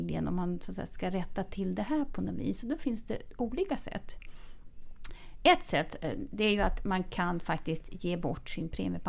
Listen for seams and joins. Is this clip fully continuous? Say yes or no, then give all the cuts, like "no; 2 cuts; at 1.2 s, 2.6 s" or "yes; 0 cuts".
yes; 0 cuts